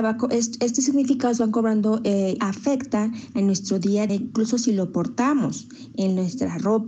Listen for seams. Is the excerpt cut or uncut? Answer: cut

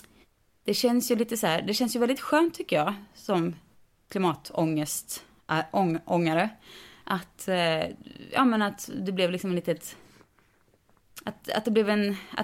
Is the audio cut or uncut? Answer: uncut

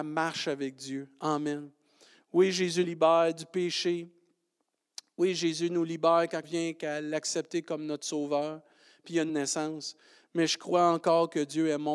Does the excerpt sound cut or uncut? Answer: cut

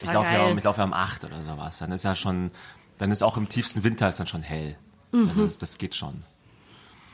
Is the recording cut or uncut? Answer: uncut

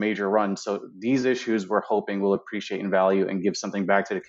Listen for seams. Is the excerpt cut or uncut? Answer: uncut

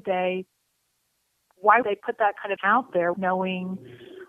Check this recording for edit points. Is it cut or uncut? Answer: cut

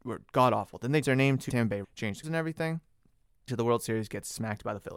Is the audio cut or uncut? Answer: cut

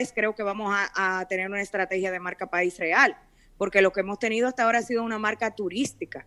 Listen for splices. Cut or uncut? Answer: uncut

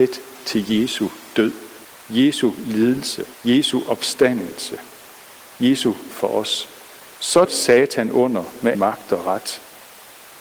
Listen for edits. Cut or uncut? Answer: cut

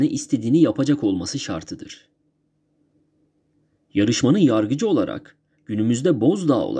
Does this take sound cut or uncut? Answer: uncut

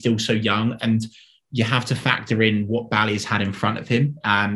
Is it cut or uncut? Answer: uncut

